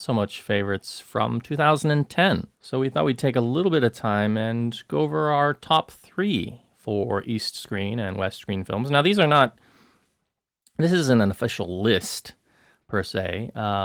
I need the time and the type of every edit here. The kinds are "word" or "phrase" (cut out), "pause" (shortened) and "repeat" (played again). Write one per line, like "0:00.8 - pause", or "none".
0:02.5 - pause